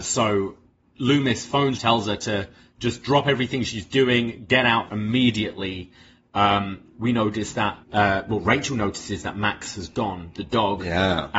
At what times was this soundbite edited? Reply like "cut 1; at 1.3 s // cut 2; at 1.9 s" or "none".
cut 1; at 1.8 s // cut 2; at 4.9 s // cut 3; at 7.8 s